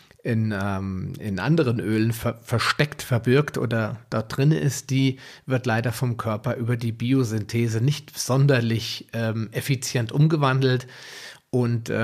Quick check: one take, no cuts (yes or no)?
yes